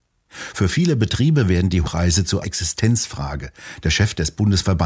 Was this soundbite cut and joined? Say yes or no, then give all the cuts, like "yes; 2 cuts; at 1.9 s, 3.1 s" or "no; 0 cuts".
yes; 2 cuts; at 1.8 s, 2.4 s